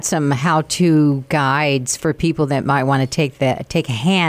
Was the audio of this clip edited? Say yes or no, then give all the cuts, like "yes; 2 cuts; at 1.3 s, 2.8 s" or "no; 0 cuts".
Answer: no; 0 cuts